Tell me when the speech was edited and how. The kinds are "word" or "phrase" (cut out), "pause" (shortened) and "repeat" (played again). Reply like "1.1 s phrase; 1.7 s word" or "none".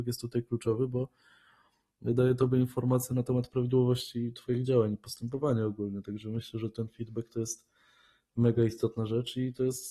none